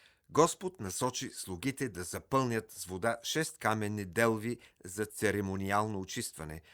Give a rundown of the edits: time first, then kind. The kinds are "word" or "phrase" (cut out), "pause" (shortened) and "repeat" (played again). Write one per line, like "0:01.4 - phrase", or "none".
none